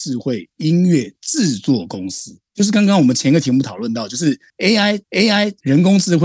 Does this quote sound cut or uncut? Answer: cut